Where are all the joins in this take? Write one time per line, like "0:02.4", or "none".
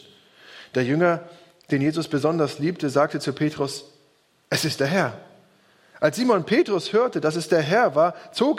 none